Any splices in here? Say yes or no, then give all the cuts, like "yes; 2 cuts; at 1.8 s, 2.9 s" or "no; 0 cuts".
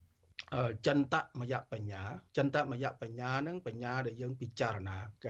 yes; 1 cut; at 2.3 s